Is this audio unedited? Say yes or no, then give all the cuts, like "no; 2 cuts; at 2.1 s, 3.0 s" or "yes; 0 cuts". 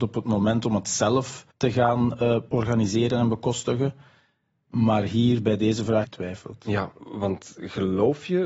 no; 3 cuts; at 1.5 s, 6.0 s, 7.0 s